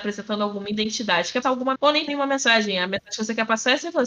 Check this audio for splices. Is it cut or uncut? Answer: cut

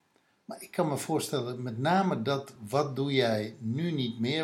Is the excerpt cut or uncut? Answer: uncut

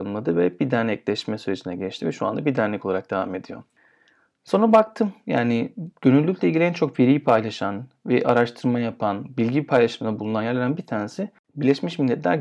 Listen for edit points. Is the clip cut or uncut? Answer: uncut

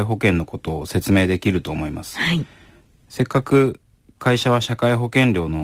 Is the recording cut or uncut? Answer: uncut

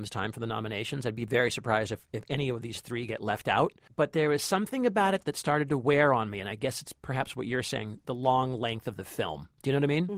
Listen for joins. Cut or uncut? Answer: cut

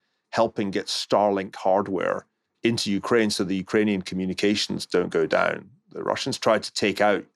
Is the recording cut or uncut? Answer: uncut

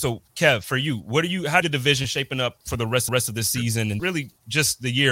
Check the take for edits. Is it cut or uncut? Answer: cut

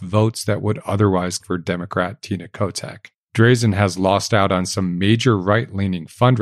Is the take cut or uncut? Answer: cut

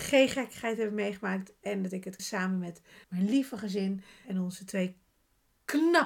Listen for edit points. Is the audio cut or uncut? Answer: cut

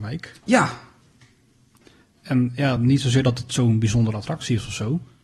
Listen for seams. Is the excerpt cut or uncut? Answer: uncut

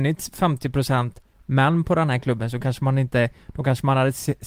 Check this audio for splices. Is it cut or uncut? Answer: uncut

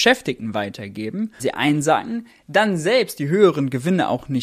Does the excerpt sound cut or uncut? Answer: cut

